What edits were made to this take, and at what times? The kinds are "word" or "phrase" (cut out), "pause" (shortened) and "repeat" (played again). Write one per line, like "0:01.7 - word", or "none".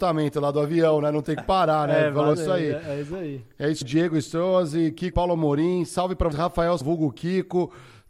0:01.4 - word
0:02.3 - word
0:03.8 - word
0:05.1 - word
0:06.3 - word
0:06.8 - word